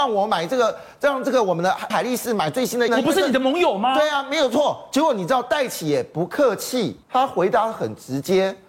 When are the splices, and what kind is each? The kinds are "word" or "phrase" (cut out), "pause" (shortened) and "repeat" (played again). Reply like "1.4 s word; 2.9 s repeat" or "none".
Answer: 1.9 s word; 2.9 s word; 7.0 s pause